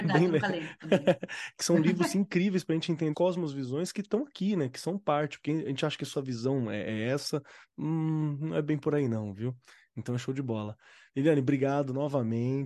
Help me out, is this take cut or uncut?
cut